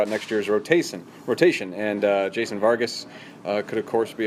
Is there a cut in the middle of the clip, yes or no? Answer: no